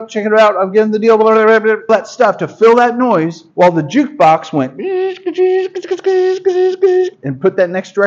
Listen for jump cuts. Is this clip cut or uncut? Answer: cut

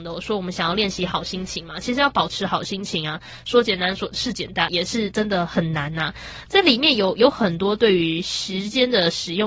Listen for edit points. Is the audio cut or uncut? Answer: cut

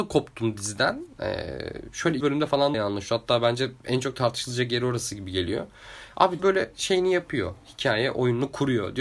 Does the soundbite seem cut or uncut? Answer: cut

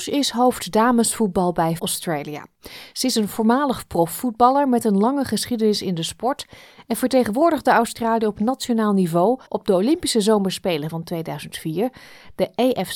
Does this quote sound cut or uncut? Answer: cut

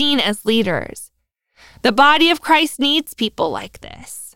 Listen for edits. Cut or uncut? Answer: uncut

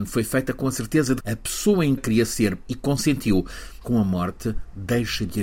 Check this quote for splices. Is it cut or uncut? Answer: cut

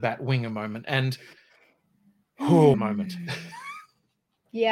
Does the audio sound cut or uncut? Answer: cut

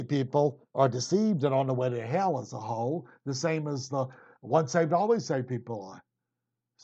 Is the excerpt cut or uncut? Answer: uncut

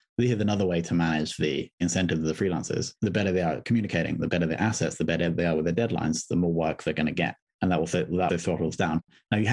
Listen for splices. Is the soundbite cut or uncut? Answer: cut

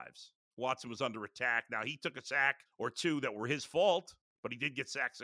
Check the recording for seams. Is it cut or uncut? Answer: cut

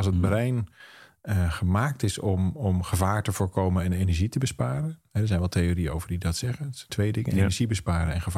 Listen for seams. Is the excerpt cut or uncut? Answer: cut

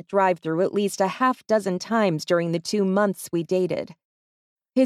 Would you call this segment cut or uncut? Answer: uncut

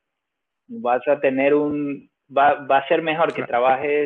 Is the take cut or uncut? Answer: cut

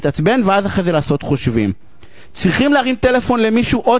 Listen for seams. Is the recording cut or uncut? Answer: uncut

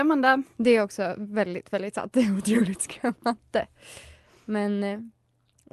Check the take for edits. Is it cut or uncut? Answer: uncut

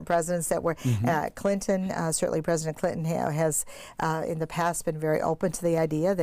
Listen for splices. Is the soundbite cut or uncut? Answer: uncut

